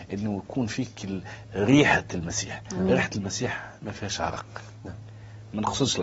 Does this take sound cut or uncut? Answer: uncut